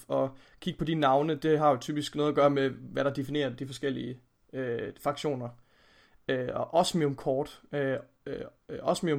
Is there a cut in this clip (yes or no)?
no